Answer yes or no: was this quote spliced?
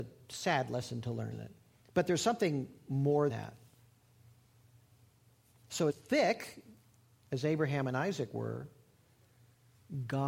yes